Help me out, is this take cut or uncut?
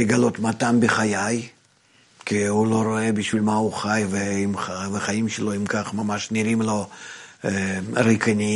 uncut